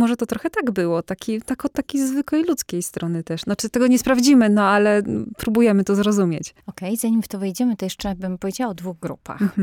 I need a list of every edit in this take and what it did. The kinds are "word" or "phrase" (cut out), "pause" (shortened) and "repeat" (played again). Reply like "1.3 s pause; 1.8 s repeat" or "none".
6.6 s pause